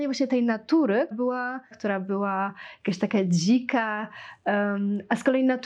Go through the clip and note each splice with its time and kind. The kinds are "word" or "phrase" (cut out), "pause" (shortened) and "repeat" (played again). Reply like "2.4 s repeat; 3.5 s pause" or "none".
1.1 s word; 1.7 s word

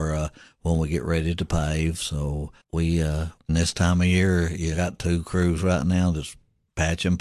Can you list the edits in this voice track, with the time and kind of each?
2.6 s pause; 3.5 s phrase; 4.7 s phrase

